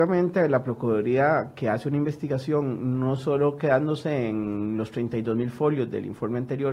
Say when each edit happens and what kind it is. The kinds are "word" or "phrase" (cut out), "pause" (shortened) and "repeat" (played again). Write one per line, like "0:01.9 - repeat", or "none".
none